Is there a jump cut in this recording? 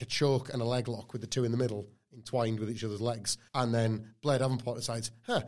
yes; 1 cut; at 3.5 s

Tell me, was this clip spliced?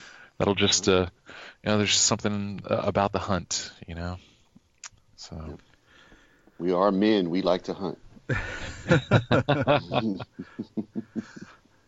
no; 0 cuts

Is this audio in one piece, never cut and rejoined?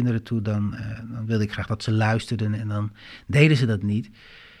yes; 0 cuts

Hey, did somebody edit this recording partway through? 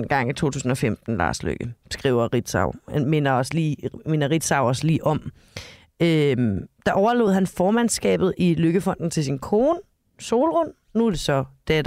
no; 0 cuts

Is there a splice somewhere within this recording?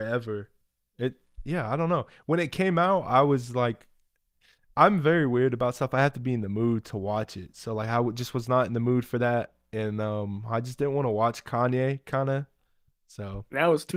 no; 0 cuts

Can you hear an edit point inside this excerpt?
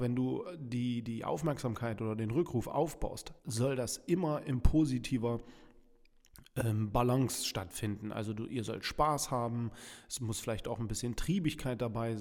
yes; 1 cut; at 3.4 s

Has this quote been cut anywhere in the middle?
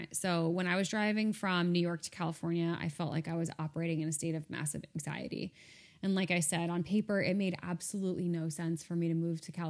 no; 0 cuts

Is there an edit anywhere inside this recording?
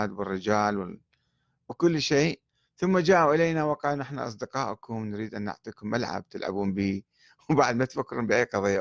no; 0 cuts

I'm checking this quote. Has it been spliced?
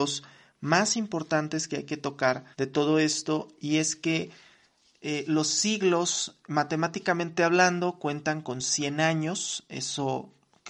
yes; 1 cut; at 2.5 s

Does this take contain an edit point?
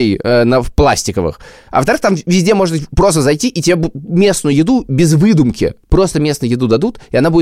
no; 0 cuts

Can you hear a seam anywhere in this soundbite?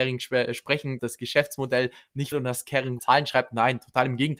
yes; 3 cuts; at 1.0 s, 2.3 s, 3.0 s

